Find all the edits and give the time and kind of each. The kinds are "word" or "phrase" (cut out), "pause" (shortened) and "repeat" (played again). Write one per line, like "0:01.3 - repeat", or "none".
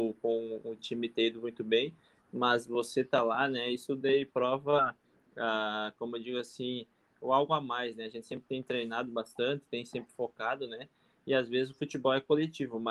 none